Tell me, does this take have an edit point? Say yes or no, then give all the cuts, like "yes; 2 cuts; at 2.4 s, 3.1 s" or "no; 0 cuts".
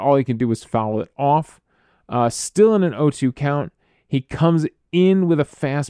no; 0 cuts